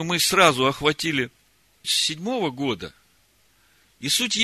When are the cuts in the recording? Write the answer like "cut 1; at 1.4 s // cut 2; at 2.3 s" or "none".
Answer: cut 1; at 1.8 s

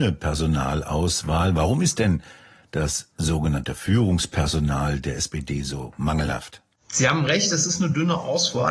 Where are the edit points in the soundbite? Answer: none

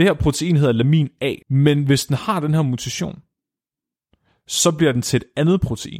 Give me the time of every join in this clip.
cut 1; at 1.4 s

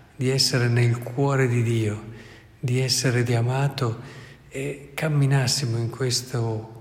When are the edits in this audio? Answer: cut 1; at 3.3 s

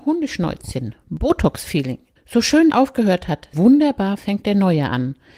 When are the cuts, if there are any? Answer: cut 1; at 2.2 s // cut 2; at 2.7 s // cut 3; at 3.5 s

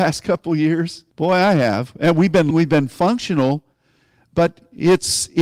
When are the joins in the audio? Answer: cut 1; at 1.1 s // cut 2; at 2.5 s

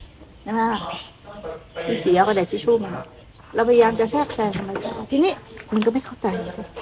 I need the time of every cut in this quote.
cut 1; at 3.2 s

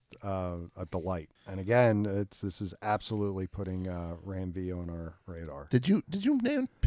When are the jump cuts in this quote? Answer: cut 1; at 1.4 s

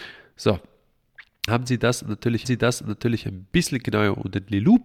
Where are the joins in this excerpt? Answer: cut 1; at 1.5 s // cut 2; at 2.4 s

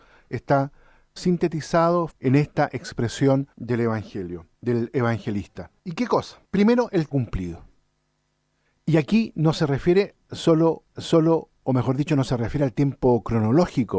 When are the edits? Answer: cut 1; at 1.2 s // cut 2; at 2.1 s // cut 3; at 3.5 s // cut 4; at 4.5 s // cut 5; at 5.8 s // cut 6; at 6.4 s // cut 7; at 7.1 s // cut 8; at 10.9 s

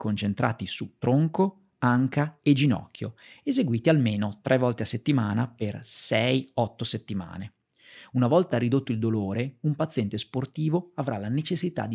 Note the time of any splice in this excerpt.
none

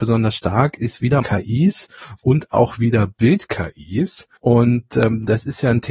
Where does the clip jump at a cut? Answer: cut 1; at 1.2 s // cut 2; at 4.4 s

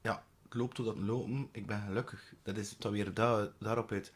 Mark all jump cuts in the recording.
cut 1; at 1.0 s // cut 2; at 2.8 s

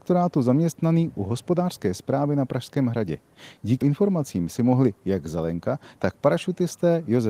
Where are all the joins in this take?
cut 1; at 3.8 s

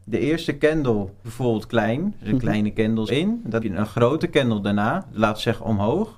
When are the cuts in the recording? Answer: cut 1; at 1.2 s // cut 2; at 3.1 s // cut 3; at 3.6 s

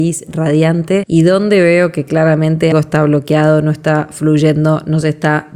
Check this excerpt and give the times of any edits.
cut 1; at 2.7 s

